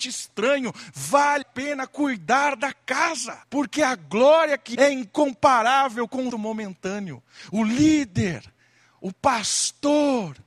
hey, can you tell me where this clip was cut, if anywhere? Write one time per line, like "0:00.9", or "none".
0:01.4
0:03.4
0:04.7
0:06.3